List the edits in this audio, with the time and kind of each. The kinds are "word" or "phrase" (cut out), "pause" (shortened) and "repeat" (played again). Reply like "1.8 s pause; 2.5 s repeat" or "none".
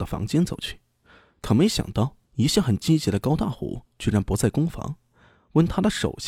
2.2 s pause